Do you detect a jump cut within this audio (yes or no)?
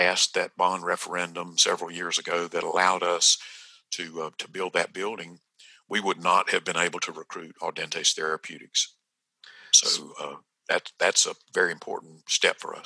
no